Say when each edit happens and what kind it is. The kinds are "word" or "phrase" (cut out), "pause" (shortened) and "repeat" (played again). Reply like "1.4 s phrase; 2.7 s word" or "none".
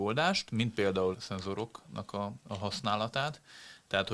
1.1 s phrase